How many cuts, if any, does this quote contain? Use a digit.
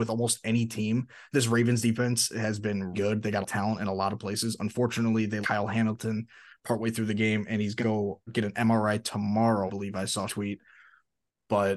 7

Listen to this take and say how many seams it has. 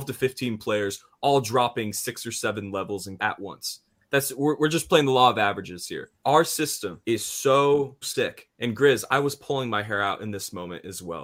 4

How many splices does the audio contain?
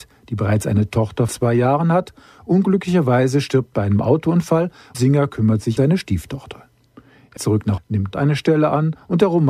7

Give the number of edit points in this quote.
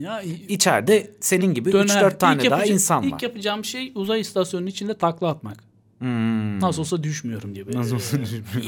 0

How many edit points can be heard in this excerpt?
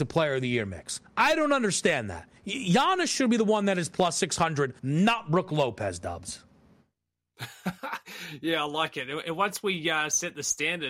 3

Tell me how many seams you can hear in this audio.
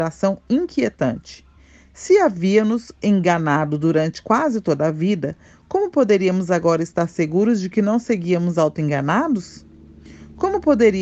0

